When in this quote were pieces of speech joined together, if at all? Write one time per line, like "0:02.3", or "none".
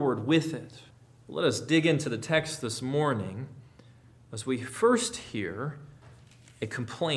0:00.9